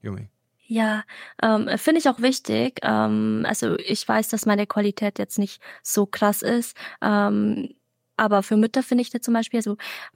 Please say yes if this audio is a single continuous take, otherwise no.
no